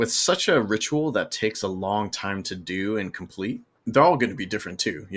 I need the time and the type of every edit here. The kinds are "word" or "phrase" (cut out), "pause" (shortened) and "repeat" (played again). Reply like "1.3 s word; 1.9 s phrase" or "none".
none